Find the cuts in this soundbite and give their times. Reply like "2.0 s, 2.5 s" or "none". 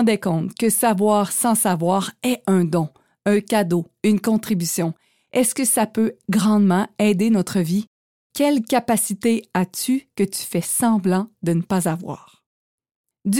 none